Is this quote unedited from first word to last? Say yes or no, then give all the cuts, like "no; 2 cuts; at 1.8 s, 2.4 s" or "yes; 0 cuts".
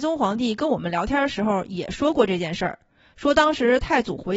yes; 0 cuts